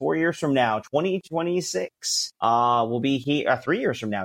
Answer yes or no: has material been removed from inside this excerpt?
yes